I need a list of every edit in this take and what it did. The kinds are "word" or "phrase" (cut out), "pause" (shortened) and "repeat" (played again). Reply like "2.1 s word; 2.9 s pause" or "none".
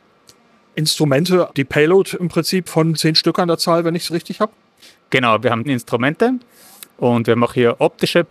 1.5 s word; 2.9 s word; 5.6 s word